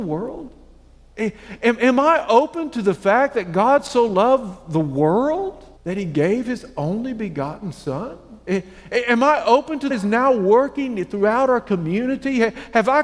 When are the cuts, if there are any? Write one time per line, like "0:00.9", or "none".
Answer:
0:05.8
0:09.9